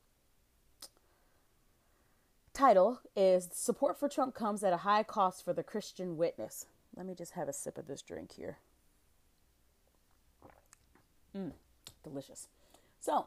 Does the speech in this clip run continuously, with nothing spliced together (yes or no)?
yes